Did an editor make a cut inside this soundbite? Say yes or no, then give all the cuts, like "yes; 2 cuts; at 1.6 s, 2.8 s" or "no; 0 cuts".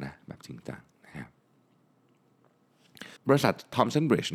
yes; 1 cut; at 3.2 s